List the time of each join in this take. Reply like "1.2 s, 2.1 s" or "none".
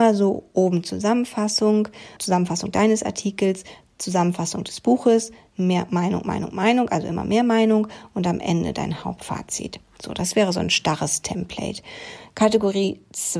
2.2 s